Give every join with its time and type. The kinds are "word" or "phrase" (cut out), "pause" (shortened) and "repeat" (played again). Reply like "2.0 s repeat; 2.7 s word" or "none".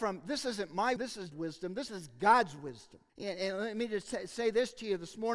1.0 s word; 1.3 s word; 1.9 s phrase; 3.1 s pause